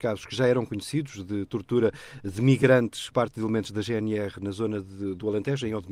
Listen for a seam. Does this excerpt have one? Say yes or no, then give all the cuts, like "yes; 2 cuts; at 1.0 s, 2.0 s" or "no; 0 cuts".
yes; 1 cut; at 3.1 s